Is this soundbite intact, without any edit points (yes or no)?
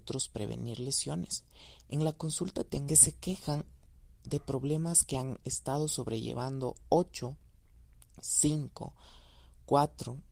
no